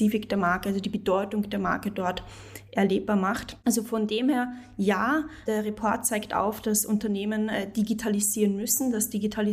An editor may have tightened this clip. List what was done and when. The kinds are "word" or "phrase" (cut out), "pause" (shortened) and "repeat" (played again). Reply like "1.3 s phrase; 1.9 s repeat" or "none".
5.5 s word

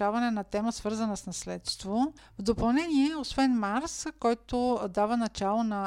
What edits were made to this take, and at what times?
2.2 s pause

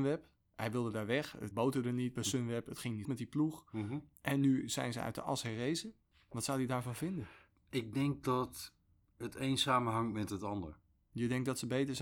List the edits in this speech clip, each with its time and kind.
1.5 s phrase; 3.0 s word

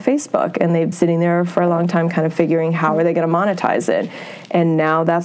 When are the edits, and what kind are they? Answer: 0.9 s word

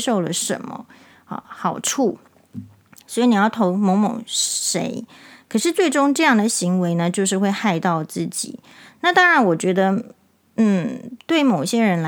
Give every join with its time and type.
none

